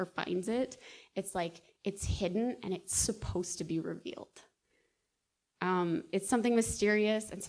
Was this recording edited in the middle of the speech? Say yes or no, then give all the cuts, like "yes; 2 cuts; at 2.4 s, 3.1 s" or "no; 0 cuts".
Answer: no; 0 cuts